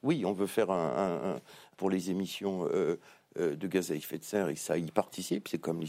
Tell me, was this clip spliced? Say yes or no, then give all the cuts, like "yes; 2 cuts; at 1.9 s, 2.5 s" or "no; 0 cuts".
yes; 1 cut; at 1.7 s